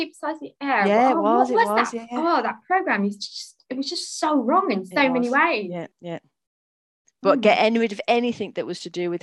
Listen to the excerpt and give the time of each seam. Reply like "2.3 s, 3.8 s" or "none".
5.9 s

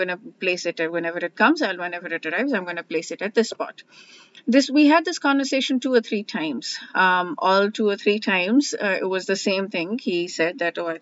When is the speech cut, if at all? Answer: none

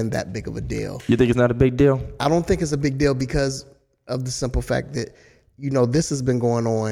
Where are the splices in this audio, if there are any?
none

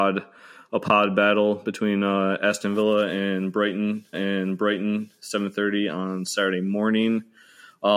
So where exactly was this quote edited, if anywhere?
4.1 s

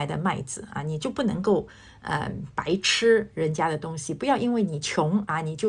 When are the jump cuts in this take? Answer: none

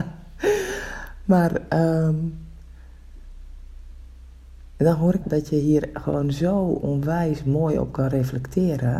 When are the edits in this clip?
5.2 s

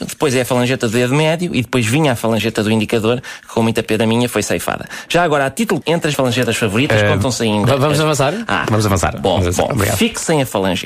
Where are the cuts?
5.8 s, 6.1 s

